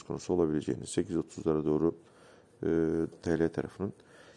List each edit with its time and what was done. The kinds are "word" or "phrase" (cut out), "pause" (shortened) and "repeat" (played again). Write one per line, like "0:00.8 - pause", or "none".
0:03.1 - word